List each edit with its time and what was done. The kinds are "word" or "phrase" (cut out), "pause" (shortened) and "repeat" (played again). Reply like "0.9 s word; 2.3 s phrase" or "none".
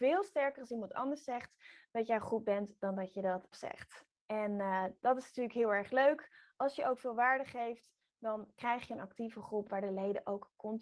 3.5 s word; 4.2 s pause